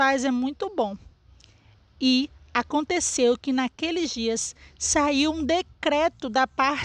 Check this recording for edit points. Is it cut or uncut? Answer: uncut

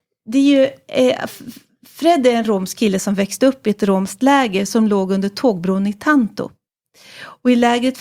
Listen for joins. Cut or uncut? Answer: uncut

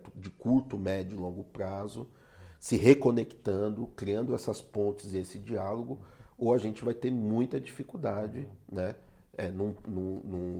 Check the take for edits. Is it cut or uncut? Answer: uncut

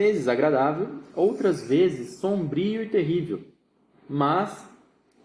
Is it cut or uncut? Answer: uncut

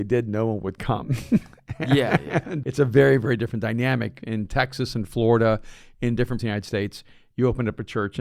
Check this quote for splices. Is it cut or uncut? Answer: cut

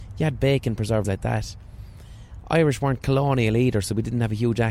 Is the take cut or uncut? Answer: cut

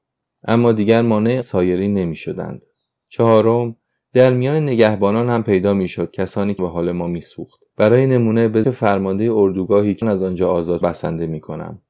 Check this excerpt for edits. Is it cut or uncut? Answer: cut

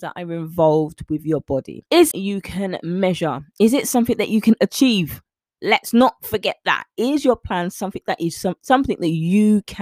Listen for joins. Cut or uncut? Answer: cut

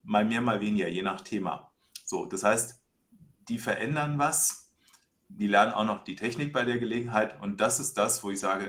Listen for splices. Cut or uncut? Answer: uncut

